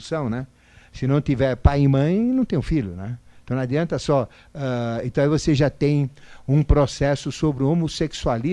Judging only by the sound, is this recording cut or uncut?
uncut